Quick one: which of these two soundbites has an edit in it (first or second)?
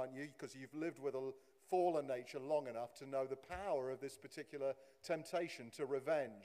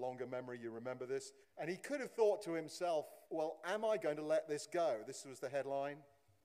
second